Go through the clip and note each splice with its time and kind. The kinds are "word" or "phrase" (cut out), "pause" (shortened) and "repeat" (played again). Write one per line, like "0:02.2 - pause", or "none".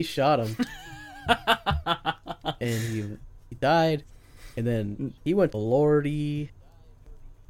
0:02.6 - phrase
0:05.2 - pause
0:05.5 - word